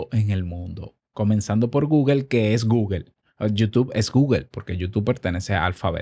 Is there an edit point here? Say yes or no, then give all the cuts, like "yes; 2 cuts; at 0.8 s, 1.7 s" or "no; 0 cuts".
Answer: no; 0 cuts